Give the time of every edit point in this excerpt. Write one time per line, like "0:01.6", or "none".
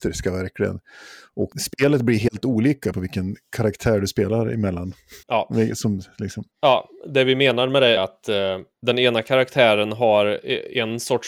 0:02.9
0:05.2
0:06.5
0:08.0